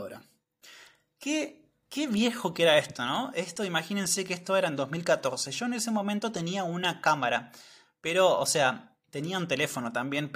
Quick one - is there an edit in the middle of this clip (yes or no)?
no